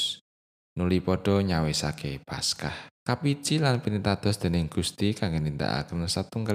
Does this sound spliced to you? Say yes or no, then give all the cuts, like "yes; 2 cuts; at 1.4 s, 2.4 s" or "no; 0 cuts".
yes; 1 cut; at 2.9 s